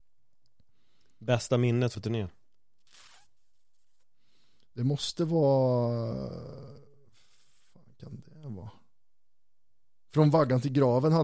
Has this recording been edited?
yes; 1 cut; at 1.9 s

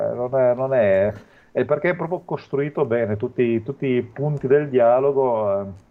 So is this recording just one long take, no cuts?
yes; 0 cuts

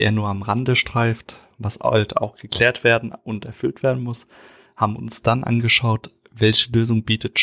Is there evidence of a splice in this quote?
no; 0 cuts

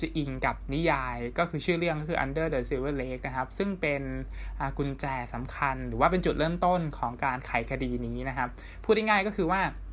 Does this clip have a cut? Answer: no; 0 cuts

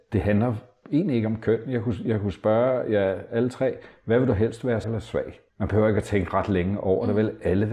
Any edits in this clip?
yes; 2 cuts; at 4.8 s, 5.5 s

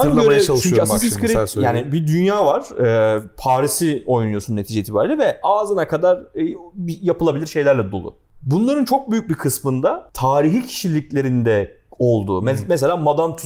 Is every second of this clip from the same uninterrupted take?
yes; 0 cuts

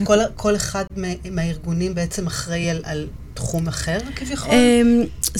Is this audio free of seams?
yes; 0 cuts

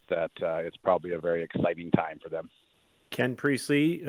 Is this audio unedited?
no; 2 cuts; at 1.2 s, 2.7 s

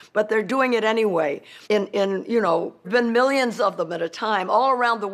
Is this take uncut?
no; 2 cuts; at 1.6 s, 2.8 s

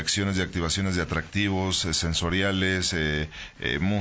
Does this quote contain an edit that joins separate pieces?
no; 0 cuts

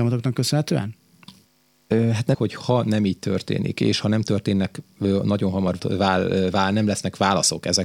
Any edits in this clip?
yes; 2 cuts; at 2.3 s, 5.8 s

